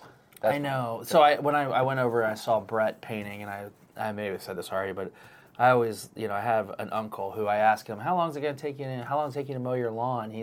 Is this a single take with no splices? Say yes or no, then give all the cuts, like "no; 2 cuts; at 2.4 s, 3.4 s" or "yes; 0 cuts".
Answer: yes; 0 cuts